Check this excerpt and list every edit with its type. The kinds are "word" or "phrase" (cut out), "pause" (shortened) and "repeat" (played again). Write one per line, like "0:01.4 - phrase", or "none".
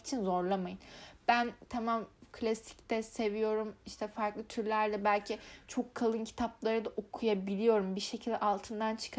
none